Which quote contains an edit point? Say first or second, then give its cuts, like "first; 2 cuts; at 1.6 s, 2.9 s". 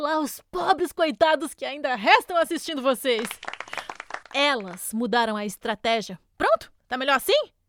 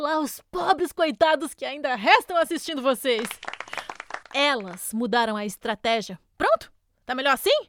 first; 1 cut; at 6.8 s